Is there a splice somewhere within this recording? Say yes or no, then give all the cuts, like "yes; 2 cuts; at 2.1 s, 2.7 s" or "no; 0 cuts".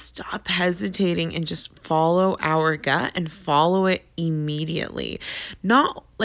no; 0 cuts